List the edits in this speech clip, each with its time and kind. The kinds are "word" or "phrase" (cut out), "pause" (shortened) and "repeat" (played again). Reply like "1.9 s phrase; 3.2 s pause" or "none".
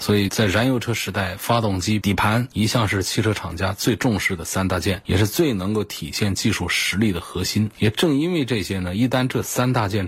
2.0 s phrase